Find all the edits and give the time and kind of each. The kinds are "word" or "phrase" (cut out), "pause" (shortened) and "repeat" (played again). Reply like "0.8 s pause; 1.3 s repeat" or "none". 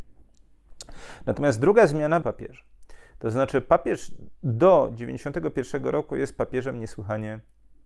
2.2 s phrase